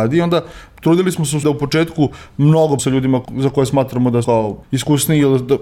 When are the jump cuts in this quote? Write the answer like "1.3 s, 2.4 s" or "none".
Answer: 1.4 s, 2.8 s, 3.2 s, 4.2 s, 4.6 s